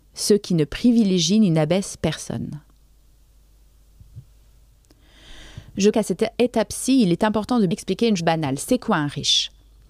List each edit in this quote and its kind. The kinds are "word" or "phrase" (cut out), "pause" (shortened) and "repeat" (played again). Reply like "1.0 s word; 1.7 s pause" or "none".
5.9 s word; 7.7 s word; 8.2 s word